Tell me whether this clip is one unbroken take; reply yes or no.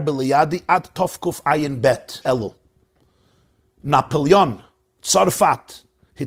no